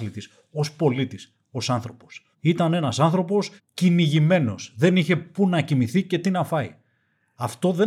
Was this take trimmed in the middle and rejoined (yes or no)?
yes